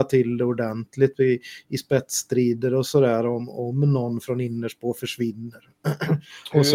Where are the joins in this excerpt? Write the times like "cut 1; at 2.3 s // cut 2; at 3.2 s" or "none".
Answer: none